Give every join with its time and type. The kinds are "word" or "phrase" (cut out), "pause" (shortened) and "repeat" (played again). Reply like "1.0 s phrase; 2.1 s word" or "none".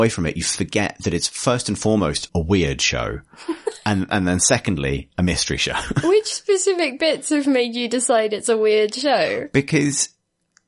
2.3 s word